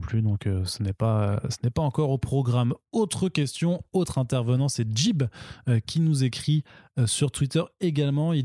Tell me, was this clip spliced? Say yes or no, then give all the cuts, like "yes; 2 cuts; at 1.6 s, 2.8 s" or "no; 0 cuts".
no; 0 cuts